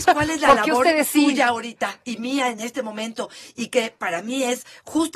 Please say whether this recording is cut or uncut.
uncut